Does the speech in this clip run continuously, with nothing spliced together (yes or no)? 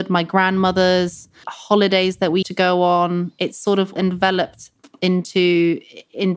no